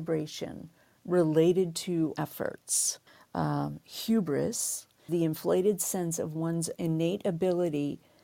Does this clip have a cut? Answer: yes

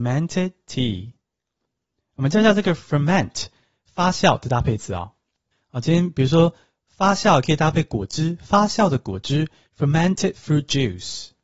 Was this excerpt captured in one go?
yes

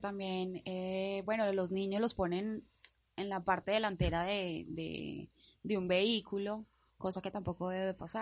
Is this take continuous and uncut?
yes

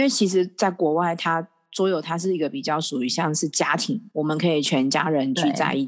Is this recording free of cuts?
no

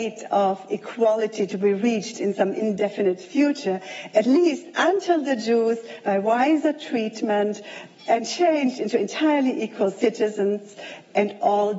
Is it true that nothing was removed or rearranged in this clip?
yes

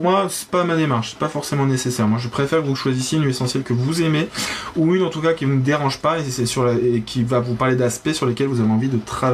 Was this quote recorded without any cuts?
yes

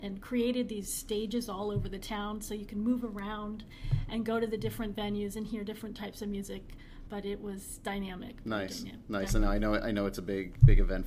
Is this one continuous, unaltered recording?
yes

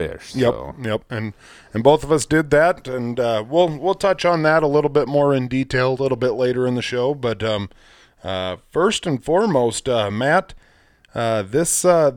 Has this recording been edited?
no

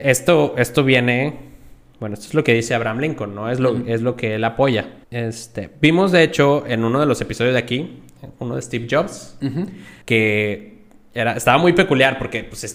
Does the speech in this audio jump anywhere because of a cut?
yes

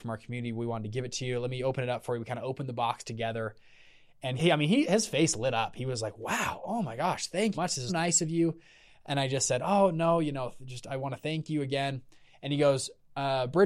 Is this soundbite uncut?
no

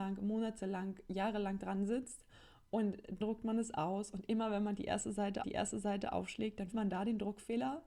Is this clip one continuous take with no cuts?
no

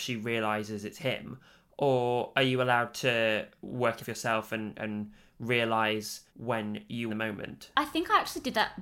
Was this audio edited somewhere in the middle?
yes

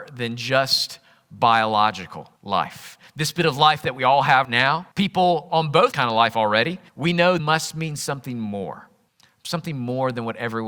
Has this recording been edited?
yes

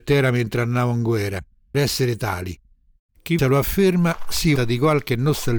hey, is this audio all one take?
no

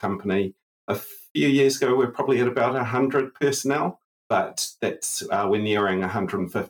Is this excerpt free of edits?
yes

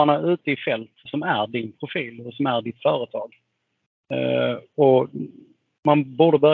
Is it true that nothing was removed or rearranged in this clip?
no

